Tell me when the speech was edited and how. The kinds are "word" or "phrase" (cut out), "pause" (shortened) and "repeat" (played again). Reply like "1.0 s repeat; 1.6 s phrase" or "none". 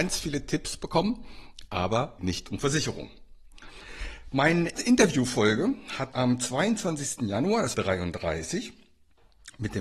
2.2 s phrase; 4.8 s word; 6.1 s word; 7.7 s phrase